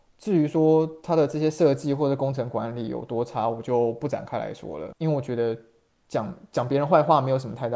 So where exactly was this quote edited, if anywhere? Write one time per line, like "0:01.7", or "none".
none